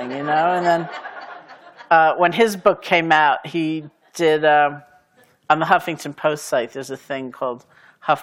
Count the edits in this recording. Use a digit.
0